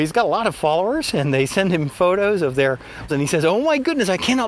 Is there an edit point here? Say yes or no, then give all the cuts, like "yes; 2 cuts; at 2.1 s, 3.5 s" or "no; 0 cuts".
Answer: yes; 1 cut; at 3.1 s